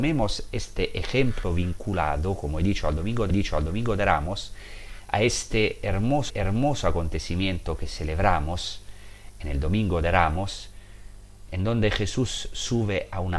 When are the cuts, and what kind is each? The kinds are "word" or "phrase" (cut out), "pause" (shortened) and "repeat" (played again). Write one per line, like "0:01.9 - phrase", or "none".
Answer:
0:03.3 - repeat
0:06.3 - repeat